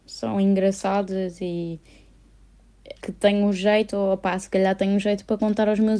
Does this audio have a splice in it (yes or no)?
yes